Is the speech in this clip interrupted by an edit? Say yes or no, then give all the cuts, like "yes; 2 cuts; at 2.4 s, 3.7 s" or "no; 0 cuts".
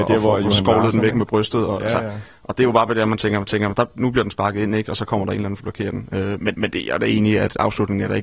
yes; 3 cuts; at 3.5 s, 5.6 s, 6.5 s